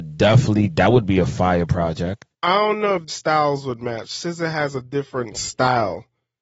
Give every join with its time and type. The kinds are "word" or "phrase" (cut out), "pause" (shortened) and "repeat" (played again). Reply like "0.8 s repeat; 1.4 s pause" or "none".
2.3 s pause; 3.1 s word